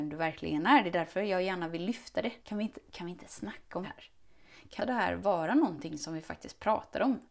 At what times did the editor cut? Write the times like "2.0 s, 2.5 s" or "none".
2.4 s, 3.8 s, 4.8 s